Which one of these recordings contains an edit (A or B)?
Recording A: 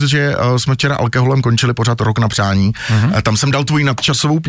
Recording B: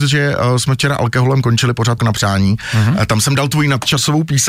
B